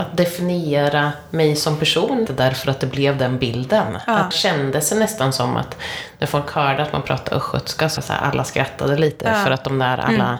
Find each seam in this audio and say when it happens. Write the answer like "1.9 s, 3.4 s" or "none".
2.3 s, 4.3 s, 8.0 s